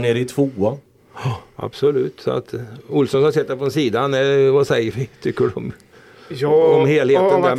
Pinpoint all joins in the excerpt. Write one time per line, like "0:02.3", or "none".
none

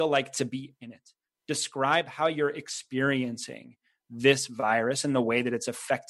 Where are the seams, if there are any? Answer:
none

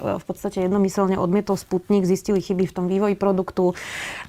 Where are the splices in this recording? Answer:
none

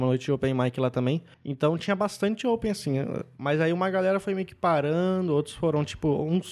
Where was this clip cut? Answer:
0:01.3

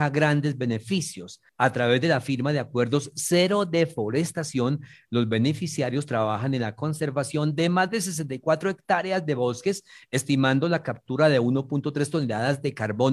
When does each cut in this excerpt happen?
0:01.5

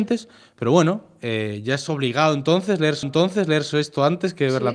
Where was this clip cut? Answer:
0:03.0

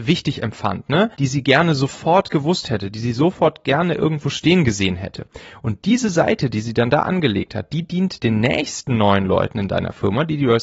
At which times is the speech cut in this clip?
0:01.1
0:08.2

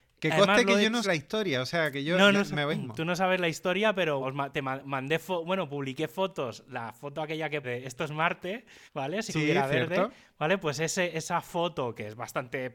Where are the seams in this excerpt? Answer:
0:01.0
0:02.3
0:02.7
0:04.2
0:07.6
0:08.9
0:09.3

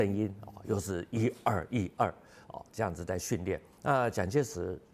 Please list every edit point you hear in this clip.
0:03.7

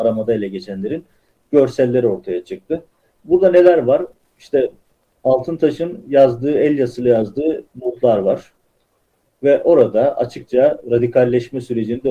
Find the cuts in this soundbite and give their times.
none

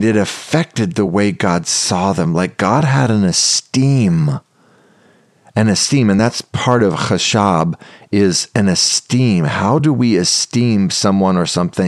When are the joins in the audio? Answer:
none

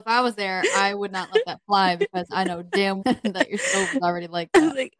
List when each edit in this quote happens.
0:03.0

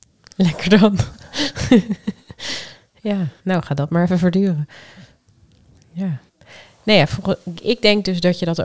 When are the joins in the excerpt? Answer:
0:03.4
0:06.3
0:07.5

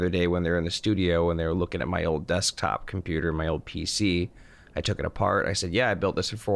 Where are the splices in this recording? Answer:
none

